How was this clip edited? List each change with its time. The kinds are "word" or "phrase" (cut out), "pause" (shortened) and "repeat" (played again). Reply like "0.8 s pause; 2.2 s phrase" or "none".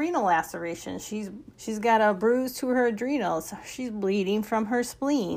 1.5 s pause